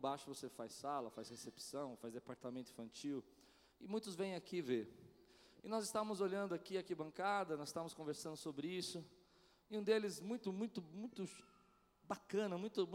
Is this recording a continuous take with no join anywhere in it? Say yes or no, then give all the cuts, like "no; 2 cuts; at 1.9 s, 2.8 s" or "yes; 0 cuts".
no; 1 cut; at 10.4 s